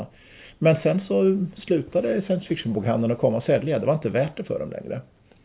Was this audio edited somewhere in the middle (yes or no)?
no